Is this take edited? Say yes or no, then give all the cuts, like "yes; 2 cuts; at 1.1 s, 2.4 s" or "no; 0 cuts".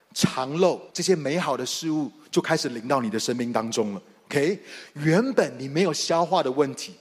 yes; 1 cut; at 0.9 s